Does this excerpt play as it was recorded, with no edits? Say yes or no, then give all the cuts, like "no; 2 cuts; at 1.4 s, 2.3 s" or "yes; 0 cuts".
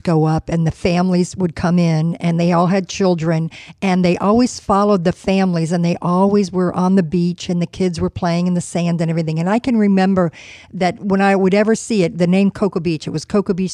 yes; 0 cuts